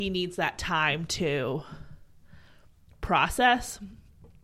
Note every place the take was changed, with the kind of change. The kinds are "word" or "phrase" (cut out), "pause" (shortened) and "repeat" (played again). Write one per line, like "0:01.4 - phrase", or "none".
none